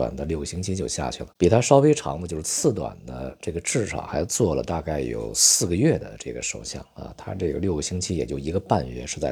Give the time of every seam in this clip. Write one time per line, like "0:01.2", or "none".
0:01.4